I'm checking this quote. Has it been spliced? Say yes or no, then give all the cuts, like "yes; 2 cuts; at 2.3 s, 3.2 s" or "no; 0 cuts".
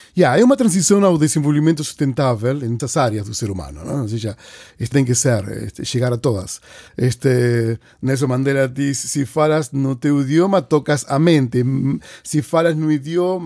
yes; 2 cuts; at 2.8 s, 4.9 s